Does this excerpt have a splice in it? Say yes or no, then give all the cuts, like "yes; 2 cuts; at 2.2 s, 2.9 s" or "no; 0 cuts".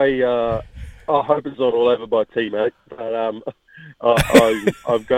no; 0 cuts